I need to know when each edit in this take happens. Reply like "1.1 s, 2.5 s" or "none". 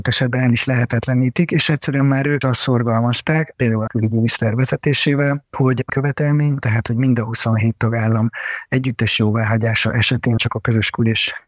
2.4 s, 3.9 s, 5.9 s, 10.4 s